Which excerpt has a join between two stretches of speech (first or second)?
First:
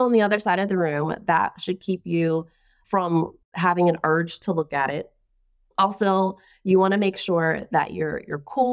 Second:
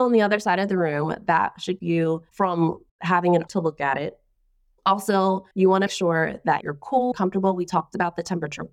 second